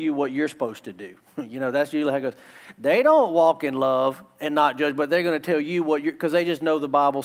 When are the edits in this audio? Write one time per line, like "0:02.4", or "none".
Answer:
none